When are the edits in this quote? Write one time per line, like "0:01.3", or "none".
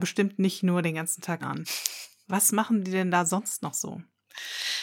0:01.4